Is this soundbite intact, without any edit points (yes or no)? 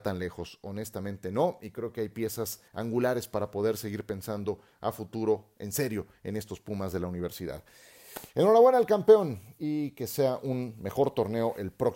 no